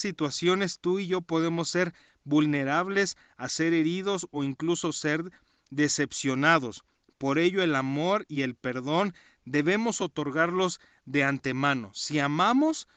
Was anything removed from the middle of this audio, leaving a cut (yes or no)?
no